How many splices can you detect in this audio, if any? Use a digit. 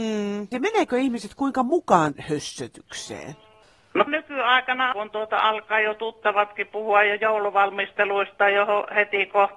3